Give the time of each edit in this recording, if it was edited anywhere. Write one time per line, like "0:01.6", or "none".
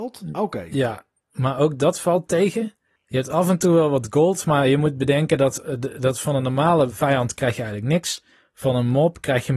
none